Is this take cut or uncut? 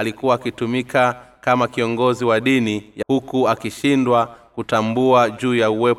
cut